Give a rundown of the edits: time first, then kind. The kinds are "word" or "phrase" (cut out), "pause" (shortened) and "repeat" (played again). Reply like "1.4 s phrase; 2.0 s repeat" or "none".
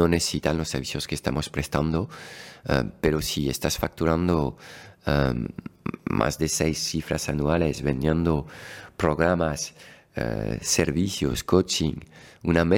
none